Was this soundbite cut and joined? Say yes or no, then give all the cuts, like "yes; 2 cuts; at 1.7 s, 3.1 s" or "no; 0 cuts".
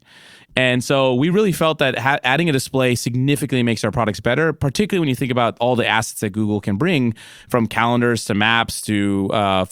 no; 0 cuts